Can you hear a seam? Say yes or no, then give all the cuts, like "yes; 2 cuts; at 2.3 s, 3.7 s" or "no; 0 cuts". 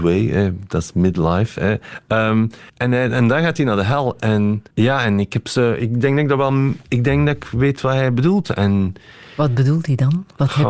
yes; 2 cuts; at 2.7 s, 4.7 s